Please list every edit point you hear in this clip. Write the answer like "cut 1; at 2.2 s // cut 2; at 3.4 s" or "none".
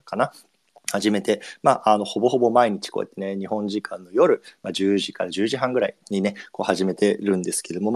cut 1; at 6.0 s